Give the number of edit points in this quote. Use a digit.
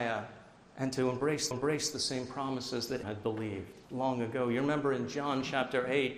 3